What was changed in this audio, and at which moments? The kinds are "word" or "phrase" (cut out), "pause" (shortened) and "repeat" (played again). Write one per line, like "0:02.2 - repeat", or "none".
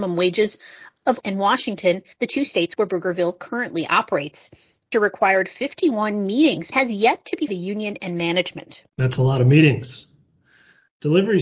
0:01.2 - word
0:02.1 - pause
0:04.9 - word
0:06.7 - phrase
0:07.5 - phrase
0:08.9 - pause